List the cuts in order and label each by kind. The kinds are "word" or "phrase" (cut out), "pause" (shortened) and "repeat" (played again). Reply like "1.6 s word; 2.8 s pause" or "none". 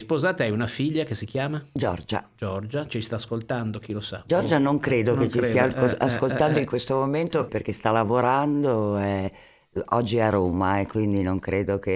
7.5 s word